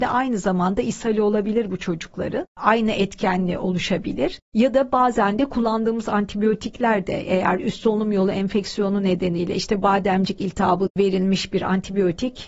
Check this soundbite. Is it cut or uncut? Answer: cut